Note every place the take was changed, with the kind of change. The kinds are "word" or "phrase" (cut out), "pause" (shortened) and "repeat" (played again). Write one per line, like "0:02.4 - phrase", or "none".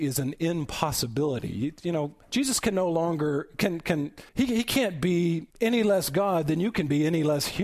0:02.2 - pause
0:04.3 - pause
0:05.5 - pause